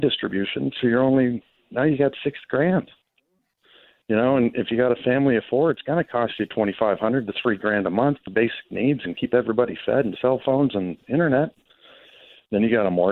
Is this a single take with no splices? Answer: no; 1 cut; at 8.2 s

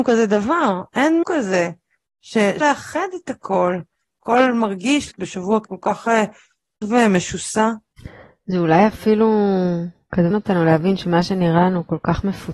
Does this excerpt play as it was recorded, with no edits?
no; 6 cuts; at 1.2 s, 2.6 s, 5.1 s, 5.6 s, 6.8 s, 10.3 s

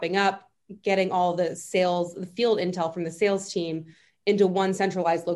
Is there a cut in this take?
no; 0 cuts

